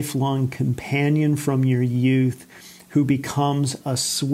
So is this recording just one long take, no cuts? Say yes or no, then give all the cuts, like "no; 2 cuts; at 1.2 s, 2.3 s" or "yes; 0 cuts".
yes; 0 cuts